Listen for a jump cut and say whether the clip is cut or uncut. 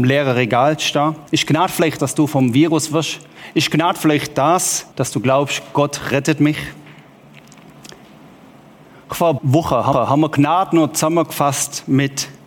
cut